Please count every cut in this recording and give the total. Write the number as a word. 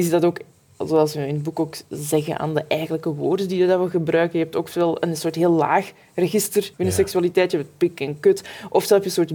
one